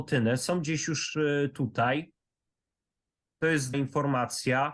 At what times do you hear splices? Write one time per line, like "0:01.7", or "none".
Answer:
0:03.7